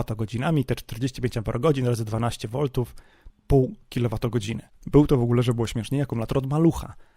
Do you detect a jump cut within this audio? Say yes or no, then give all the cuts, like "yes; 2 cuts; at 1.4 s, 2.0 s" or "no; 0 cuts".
yes; 1 cut; at 3.3 s